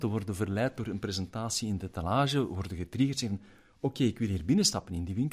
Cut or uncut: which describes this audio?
uncut